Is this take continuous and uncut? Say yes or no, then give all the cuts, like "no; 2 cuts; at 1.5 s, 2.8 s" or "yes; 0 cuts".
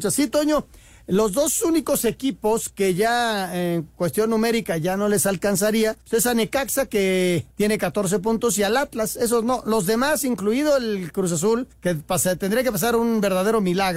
no; 3 cuts; at 6.0 s, 7.5 s, 11.7 s